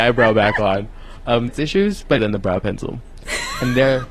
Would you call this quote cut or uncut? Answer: cut